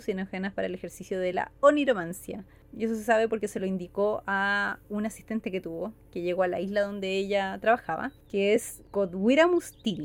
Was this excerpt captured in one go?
yes; 0 cuts

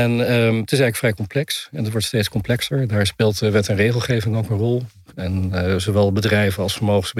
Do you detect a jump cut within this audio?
no; 0 cuts

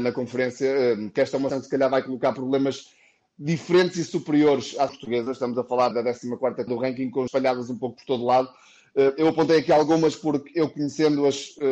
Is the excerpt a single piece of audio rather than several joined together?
no; 5 cuts; at 1.5 s, 4.9 s, 5.9 s, 6.7 s, 7.3 s

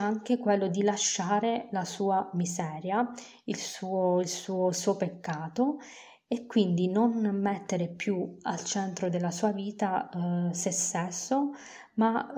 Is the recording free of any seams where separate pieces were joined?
yes; 0 cuts

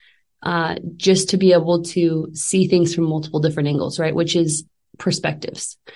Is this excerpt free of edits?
yes; 0 cuts

